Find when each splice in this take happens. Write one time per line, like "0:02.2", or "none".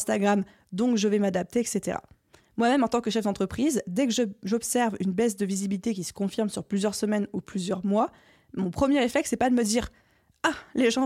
none